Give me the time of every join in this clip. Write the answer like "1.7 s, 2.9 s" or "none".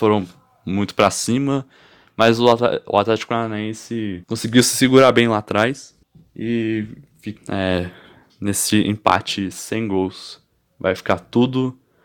4.2 s, 6.0 s, 7.4 s